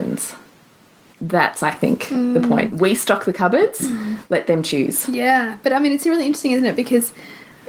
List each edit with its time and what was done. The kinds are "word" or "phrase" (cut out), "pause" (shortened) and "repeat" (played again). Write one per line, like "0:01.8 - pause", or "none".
none